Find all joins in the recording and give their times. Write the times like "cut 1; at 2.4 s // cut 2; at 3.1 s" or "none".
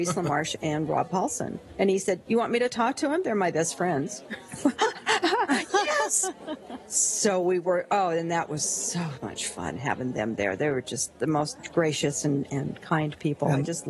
none